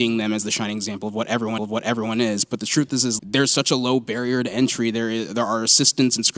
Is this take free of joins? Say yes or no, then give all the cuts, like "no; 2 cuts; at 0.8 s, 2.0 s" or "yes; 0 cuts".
no; 2 cuts; at 1.6 s, 3.2 s